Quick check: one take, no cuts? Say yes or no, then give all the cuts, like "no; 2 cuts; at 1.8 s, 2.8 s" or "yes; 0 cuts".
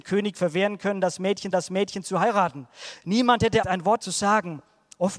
no; 3 cuts; at 1.5 s, 3.6 s, 4.0 s